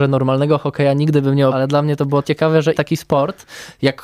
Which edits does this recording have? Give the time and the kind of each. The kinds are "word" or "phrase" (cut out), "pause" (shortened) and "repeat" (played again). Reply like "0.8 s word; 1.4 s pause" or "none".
1.5 s word; 2.2 s word; 2.7 s word